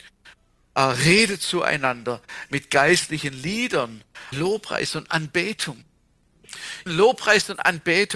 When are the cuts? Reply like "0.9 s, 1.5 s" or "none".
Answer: 4.3 s, 6.9 s